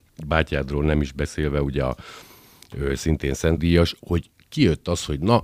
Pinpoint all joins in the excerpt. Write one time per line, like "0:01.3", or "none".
0:03.6